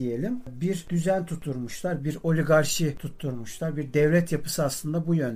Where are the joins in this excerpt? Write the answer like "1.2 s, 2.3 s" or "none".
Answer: none